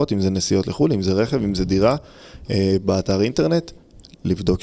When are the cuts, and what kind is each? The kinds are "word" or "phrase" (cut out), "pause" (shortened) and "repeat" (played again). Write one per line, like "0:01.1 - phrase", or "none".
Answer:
none